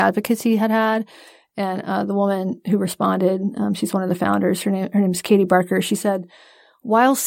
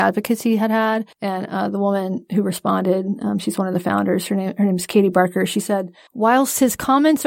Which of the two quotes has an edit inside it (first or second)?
second